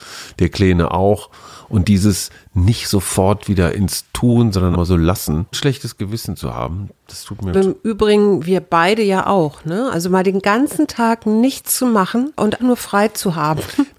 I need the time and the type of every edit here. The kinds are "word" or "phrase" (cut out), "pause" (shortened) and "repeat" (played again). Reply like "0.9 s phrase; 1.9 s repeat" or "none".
4.7 s word; 5.5 s word; 7.5 s word; 12.6 s word